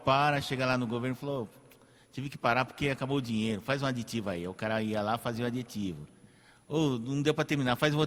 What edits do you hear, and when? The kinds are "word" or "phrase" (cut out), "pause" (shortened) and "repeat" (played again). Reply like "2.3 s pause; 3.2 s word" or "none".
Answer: none